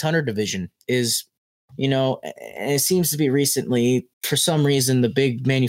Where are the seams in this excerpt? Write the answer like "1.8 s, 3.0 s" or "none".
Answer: 1.5 s, 4.1 s